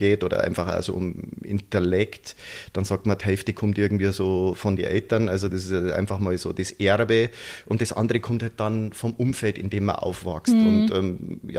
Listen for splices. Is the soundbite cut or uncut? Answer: cut